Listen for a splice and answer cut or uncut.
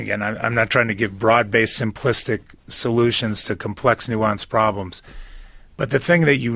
uncut